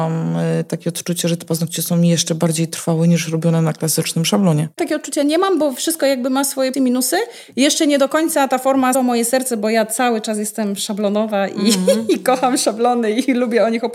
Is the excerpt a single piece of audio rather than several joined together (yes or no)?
no